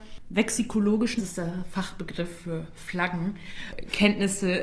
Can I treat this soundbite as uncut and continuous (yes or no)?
no